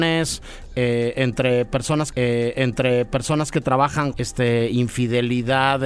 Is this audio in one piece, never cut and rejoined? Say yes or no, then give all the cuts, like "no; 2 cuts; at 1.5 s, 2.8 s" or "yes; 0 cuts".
no; 2 cuts; at 2.1 s, 4.1 s